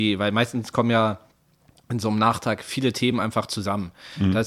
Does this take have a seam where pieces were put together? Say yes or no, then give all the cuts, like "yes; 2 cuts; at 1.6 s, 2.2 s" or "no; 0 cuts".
no; 0 cuts